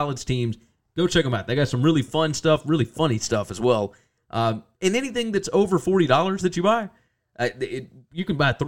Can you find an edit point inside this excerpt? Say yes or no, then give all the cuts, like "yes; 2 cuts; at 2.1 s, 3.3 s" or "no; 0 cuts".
no; 0 cuts